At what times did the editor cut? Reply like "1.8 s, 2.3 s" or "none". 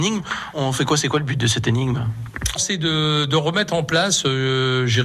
2.6 s